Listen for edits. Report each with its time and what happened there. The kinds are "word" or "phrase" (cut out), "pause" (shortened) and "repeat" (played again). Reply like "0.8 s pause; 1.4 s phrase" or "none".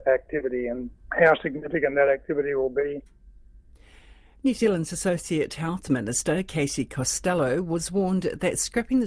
none